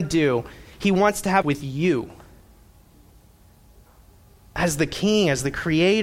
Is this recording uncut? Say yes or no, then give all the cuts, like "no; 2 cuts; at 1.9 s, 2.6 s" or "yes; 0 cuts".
no; 1 cut; at 1.4 s